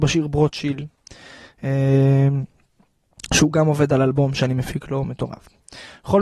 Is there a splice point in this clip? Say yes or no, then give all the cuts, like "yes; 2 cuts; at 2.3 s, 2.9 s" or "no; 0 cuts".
no; 0 cuts